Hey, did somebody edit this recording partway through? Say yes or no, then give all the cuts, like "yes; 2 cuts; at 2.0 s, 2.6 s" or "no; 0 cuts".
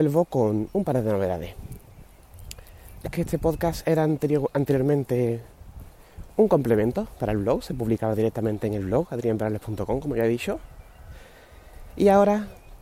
yes; 1 cut; at 3.0 s